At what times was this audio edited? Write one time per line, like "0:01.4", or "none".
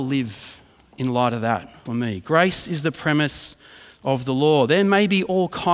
0:01.9